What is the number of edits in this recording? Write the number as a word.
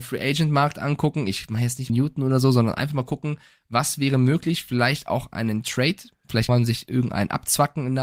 two